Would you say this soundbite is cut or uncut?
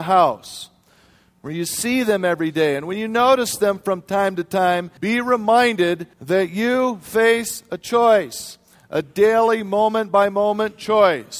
cut